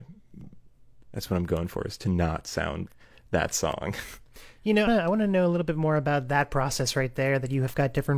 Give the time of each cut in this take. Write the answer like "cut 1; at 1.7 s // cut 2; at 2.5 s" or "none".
cut 1; at 1.0 s // cut 2; at 2.9 s // cut 3; at 4.9 s